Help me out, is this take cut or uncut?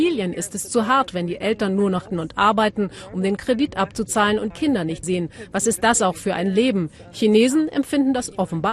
cut